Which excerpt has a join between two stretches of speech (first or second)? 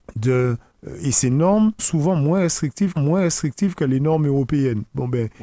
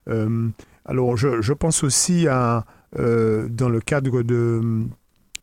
first